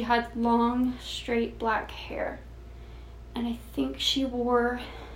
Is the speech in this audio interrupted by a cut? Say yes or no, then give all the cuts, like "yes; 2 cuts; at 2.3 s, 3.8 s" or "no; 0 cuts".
no; 0 cuts